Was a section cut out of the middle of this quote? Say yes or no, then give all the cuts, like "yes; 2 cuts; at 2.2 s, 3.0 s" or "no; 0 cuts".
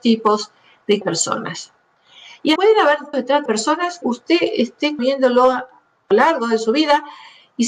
yes; 7 cuts; at 1.0 s, 2.6 s, 3.1 s, 3.5 s, 4.0 s, 5.0 s, 6.1 s